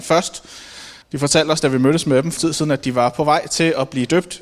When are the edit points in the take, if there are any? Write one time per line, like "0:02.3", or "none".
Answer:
0:01.0
0:02.4